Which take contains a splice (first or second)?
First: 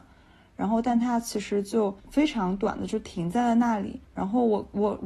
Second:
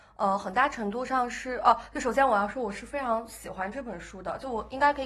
first